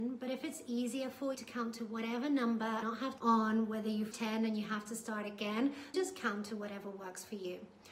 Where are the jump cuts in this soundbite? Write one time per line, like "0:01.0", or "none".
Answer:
0:01.3
0:02.8
0:03.2
0:04.1
0:05.9